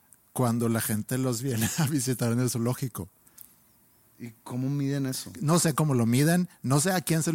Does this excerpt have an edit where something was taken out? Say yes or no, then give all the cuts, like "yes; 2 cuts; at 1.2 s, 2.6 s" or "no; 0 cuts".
no; 0 cuts